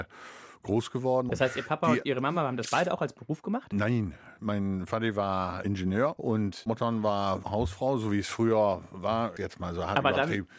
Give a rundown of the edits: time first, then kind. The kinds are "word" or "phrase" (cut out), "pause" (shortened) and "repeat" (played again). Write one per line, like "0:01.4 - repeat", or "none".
none